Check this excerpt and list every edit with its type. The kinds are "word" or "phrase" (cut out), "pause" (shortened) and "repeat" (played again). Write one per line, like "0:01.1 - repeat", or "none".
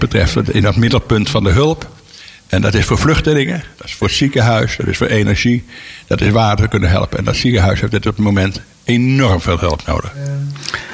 none